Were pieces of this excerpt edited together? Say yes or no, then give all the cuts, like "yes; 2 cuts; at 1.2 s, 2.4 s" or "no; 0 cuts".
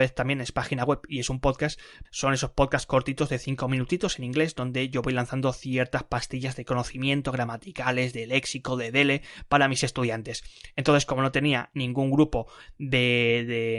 yes; 1 cut; at 2.0 s